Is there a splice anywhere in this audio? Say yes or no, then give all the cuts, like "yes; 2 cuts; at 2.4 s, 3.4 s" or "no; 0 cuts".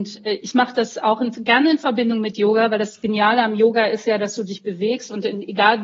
no; 0 cuts